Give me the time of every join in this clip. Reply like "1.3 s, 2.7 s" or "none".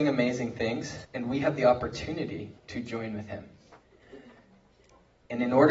1.0 s, 2.6 s